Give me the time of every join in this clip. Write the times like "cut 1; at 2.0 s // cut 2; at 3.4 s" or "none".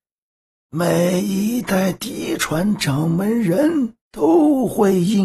cut 1; at 4.0 s